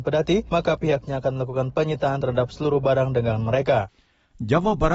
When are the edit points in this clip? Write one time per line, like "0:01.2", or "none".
none